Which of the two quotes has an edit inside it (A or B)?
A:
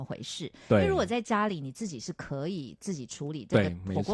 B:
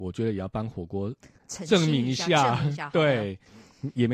B